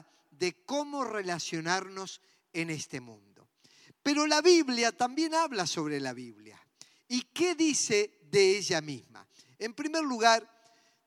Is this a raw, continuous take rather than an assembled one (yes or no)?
yes